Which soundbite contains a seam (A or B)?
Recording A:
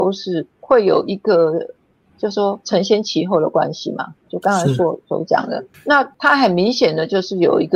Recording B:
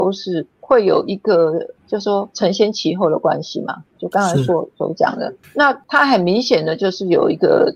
B